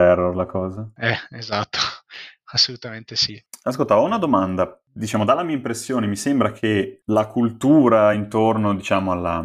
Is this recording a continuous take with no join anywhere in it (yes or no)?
yes